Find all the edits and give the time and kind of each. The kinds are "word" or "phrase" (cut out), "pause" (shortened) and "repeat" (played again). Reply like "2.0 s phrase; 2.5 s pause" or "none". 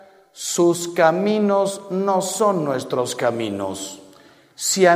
none